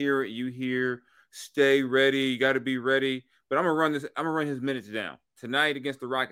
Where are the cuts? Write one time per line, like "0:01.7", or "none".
none